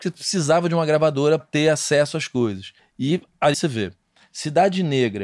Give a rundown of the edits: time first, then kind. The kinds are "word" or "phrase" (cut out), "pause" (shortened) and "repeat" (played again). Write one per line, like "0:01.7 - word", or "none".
0:01.4 - word
0:02.8 - pause
0:03.5 - phrase